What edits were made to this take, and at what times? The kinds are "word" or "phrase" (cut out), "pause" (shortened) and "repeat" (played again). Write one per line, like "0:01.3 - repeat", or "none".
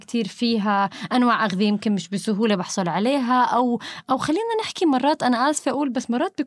none